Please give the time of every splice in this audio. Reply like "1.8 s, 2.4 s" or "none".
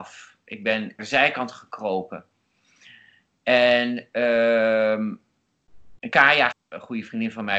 1.0 s, 6.1 s, 6.5 s

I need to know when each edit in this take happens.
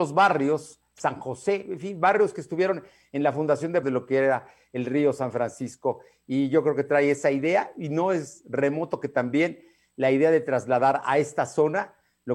3.8 s

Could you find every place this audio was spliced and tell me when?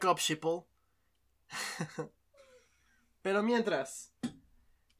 none

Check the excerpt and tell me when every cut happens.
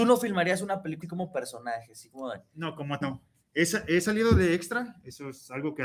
1.0 s, 3.0 s

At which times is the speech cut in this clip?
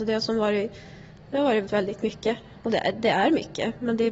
1.7 s

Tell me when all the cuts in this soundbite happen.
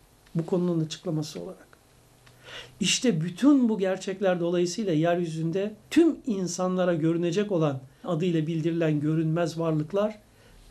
5.8 s, 8.0 s

